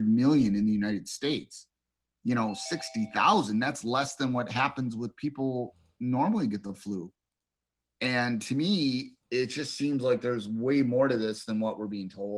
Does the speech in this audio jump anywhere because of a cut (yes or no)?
no